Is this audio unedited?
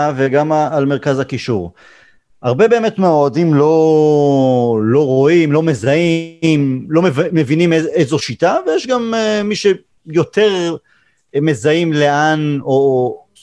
yes; 0 cuts

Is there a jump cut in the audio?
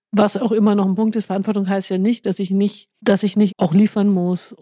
yes; 2 cuts; at 2.9 s, 3.5 s

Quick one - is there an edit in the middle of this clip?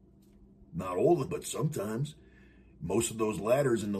yes; 1 cut; at 1.3 s

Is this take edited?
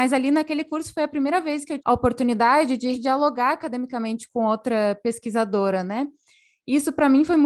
yes; 2 cuts; at 1.8 s, 2.9 s

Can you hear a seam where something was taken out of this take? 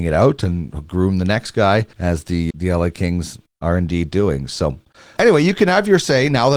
yes; 3 cuts; at 1.9 s, 2.5 s, 5.2 s

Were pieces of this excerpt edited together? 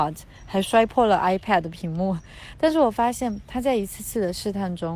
no; 0 cuts

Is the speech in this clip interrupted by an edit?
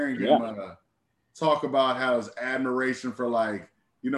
no; 0 cuts

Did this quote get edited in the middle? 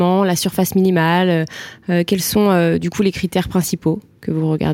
no; 0 cuts

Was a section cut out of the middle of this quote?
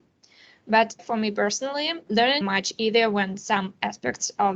yes; 3 cuts; at 1.0 s, 2.1 s, 2.4 s

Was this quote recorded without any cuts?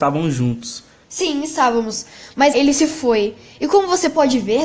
no; 1 cut; at 2.5 s

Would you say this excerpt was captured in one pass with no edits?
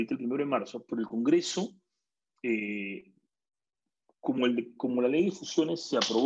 yes; 0 cuts

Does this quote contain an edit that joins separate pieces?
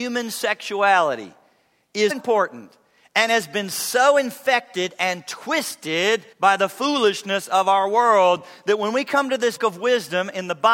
yes; 3 cuts; at 2.1 s, 6.3 s, 9.6 s

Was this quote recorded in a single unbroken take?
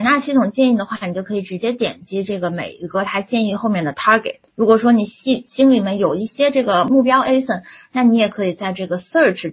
yes; 0 cuts

